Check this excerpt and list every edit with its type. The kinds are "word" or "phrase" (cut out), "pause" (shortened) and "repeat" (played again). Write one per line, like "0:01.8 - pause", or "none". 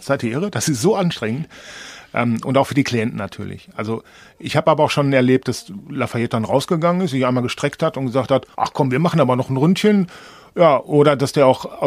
0:08.5 - pause